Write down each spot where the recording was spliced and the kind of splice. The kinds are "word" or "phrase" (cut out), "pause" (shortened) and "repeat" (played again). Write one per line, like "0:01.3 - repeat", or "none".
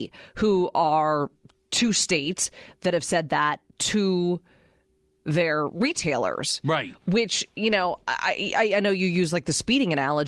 none